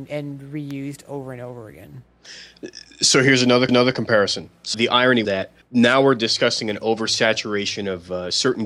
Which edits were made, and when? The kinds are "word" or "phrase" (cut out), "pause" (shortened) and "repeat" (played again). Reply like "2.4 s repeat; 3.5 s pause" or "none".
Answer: 3.7 s repeat; 4.7 s word; 5.2 s phrase; 5.6 s pause